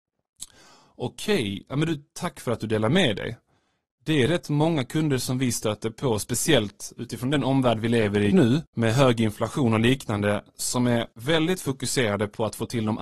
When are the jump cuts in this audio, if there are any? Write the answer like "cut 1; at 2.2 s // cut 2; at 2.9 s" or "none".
cut 1; at 8.3 s // cut 2; at 11.1 s